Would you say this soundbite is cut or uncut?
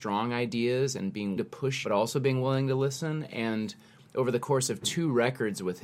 cut